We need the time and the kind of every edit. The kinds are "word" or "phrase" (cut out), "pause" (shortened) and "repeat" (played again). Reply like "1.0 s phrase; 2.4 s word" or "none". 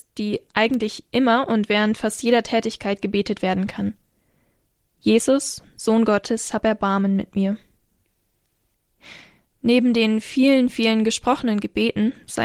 none